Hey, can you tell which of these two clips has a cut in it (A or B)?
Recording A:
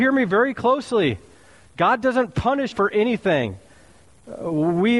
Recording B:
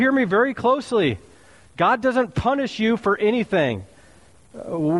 A